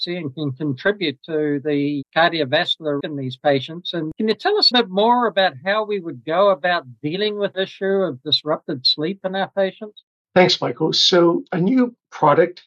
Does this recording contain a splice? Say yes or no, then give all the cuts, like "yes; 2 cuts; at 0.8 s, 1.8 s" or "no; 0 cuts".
yes; 3 cuts; at 3.0 s, 4.7 s, 7.5 s